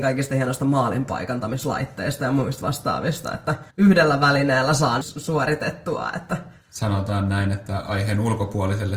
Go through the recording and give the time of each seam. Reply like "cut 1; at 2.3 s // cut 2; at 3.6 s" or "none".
cut 1; at 3.7 s // cut 2; at 5.0 s // cut 3; at 6.6 s